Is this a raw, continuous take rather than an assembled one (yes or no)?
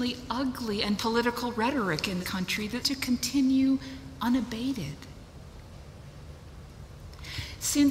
no